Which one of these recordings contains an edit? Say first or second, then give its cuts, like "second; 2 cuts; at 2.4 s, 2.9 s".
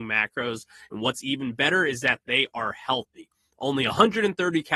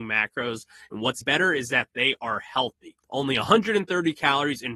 second; 2 cuts; at 1.2 s, 3.0 s